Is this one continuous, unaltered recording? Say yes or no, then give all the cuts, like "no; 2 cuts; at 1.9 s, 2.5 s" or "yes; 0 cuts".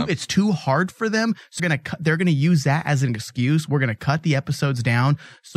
no; 1 cut; at 1.6 s